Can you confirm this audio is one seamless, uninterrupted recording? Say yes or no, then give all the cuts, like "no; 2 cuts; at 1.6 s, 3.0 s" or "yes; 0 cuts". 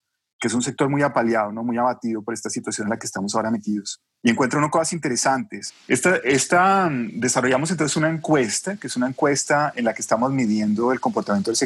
yes; 0 cuts